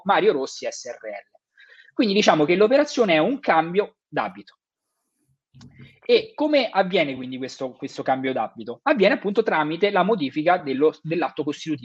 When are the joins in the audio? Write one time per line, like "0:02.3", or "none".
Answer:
none